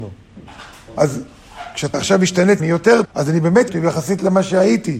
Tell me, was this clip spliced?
yes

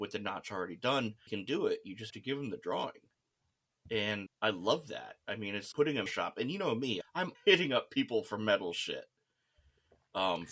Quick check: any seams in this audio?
yes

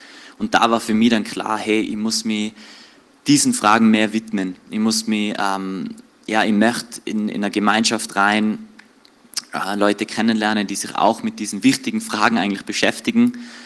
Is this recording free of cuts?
yes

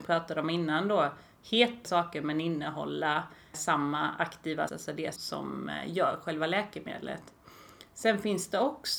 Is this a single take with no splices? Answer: no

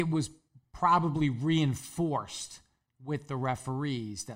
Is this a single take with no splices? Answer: yes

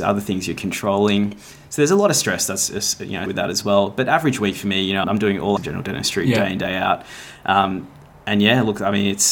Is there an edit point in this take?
yes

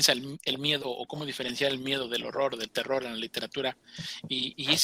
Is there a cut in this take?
yes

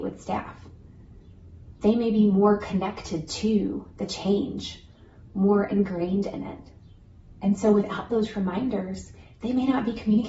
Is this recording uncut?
no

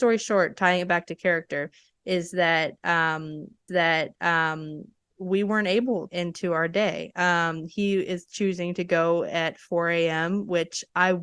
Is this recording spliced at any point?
yes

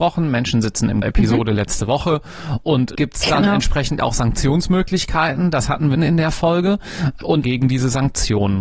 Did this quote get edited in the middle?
yes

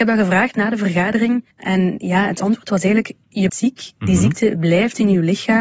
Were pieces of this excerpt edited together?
yes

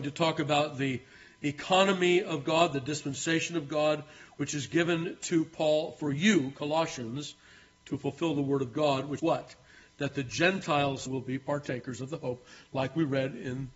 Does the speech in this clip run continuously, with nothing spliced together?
no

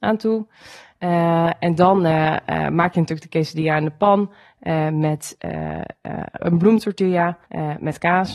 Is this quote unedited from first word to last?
no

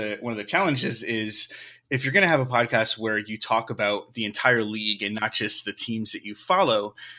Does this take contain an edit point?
no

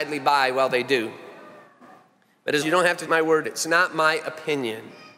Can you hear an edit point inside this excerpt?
yes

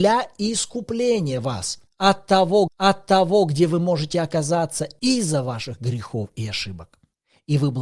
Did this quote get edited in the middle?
yes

